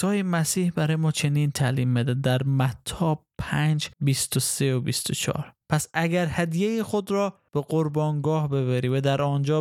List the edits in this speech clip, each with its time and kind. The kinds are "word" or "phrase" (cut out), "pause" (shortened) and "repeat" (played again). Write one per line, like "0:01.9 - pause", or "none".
0:03.9 - pause
0:05.6 - pause
0:07.5 - pause